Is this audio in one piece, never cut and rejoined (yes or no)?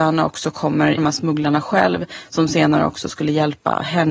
no